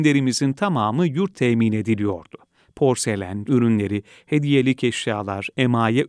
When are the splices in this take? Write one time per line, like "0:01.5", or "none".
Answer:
0:01.3
0:03.5

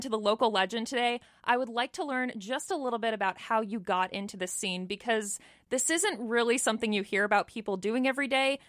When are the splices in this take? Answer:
none

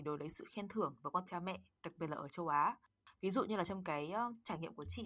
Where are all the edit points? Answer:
0:01.2

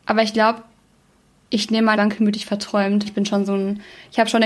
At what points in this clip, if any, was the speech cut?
0:01.9
0:03.0

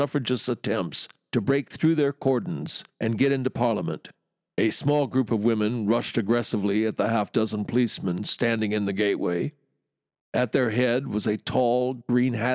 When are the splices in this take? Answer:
none

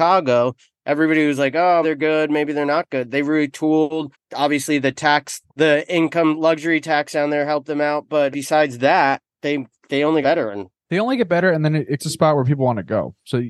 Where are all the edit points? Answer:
0:01.8
0:04.1
0:08.3
0:10.2
0:12.0

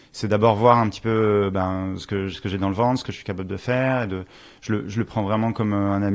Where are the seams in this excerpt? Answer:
none

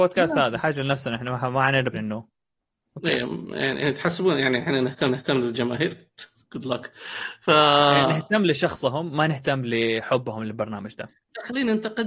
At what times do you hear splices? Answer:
0:01.9
0:05.1

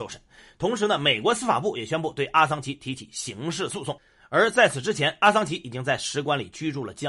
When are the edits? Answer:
none

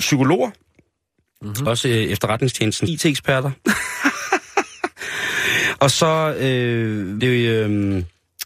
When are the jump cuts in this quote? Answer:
0:01.7
0:02.9
0:07.2

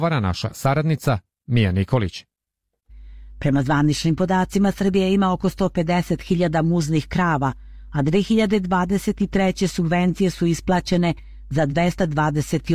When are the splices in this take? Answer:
none

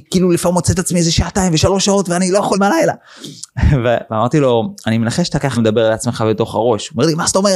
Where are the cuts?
0:02.6
0:05.6

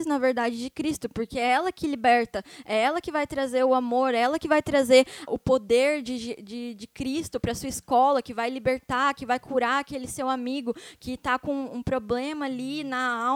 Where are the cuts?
0:05.3

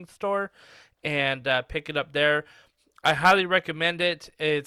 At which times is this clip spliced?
none

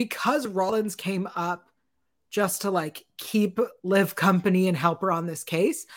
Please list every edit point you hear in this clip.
none

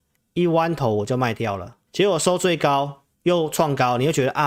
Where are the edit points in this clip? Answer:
0:01.9
0:03.1

